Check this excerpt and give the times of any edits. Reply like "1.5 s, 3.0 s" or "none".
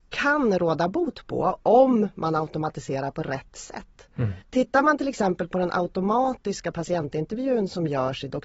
4.4 s